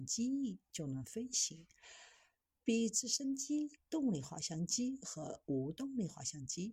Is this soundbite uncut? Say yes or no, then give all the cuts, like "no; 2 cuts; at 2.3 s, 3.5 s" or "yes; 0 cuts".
yes; 0 cuts